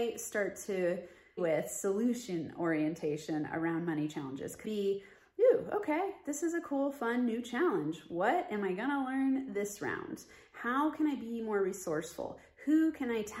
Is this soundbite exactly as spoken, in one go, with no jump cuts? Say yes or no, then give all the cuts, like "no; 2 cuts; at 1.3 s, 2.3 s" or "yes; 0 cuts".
no; 2 cuts; at 1.4 s, 4.6 s